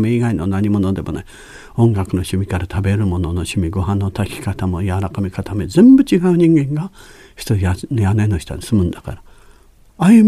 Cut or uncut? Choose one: uncut